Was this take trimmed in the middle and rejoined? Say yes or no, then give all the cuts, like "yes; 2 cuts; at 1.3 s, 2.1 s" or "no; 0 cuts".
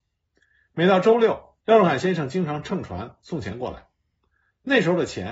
yes; 1 cut; at 1.6 s